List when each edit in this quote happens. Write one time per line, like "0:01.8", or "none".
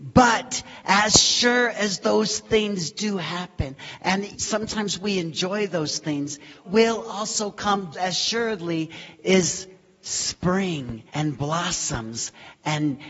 0:04.3
0:06.6
0:07.9
0:11.1